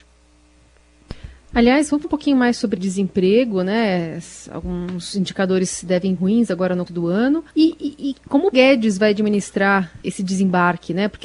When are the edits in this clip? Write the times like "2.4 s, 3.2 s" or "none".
2.0 s, 2.8 s, 6.2 s, 6.9 s, 7.5 s, 8.5 s, 10.0 s